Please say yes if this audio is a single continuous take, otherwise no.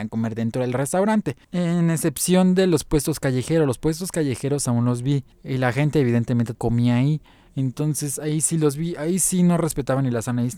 no